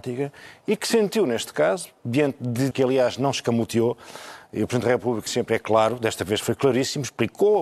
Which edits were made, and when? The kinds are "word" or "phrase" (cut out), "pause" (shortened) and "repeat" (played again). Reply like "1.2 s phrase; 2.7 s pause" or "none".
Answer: 2.7 s word; 5.3 s word